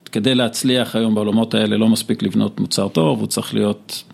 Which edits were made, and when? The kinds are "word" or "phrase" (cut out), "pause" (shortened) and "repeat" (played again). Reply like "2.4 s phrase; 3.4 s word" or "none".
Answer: none

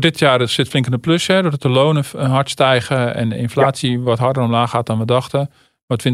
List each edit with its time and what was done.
none

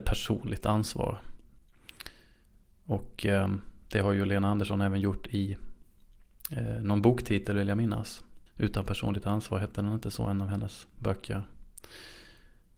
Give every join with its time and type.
8.5 s pause

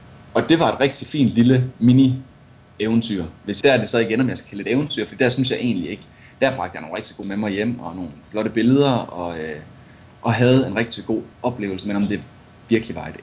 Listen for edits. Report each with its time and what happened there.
3.6 s phrase; 7.2 s word; 11.3 s pause

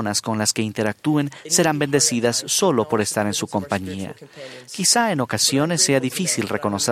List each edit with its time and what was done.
none

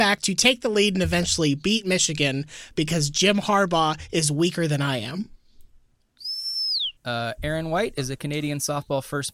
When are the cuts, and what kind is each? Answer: 7.0 s pause

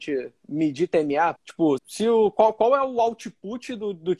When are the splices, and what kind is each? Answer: 1.4 s word; 1.8 s word

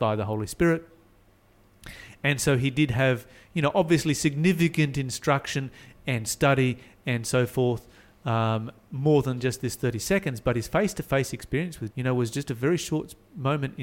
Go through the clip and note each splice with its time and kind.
11.9 s word

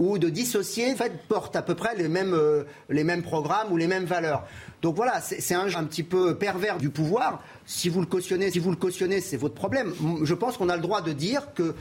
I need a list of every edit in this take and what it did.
0.9 s phrase; 1.3 s pause; 5.7 s word; 6.8 s word; 8.5 s repeat

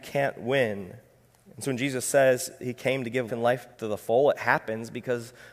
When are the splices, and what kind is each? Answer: 1.3 s pause; 3.3 s word; 3.7 s pause

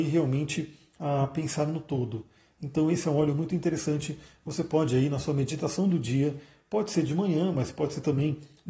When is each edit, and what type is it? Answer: none

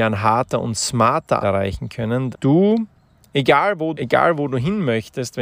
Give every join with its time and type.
1.4 s word; 2.3 s word; 3.9 s word

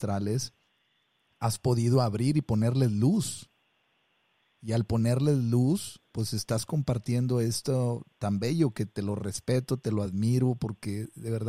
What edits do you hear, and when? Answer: none

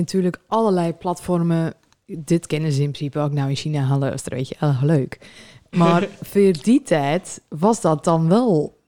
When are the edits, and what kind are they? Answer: none

